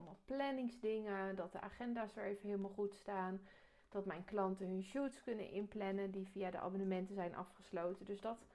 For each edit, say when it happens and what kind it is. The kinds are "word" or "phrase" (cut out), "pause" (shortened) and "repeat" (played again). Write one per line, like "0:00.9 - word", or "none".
none